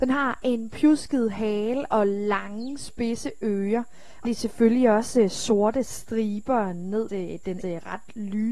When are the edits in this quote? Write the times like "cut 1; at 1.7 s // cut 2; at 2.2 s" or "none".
cut 1; at 4.2 s // cut 2; at 7.1 s // cut 3; at 7.6 s